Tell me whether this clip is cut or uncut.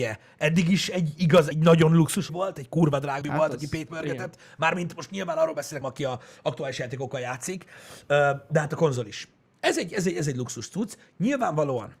cut